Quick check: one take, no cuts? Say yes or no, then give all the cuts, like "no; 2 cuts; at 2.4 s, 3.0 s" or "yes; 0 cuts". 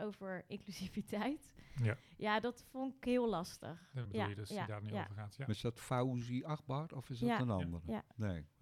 no; 1 cut; at 4.1 s